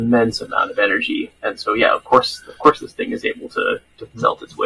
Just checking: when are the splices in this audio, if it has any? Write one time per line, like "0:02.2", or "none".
0:01.4